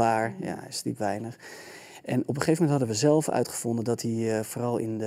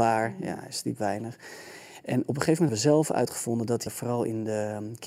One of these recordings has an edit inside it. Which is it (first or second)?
second